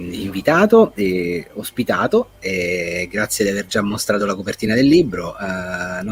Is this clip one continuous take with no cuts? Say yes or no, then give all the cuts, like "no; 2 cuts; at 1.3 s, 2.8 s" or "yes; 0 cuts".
yes; 0 cuts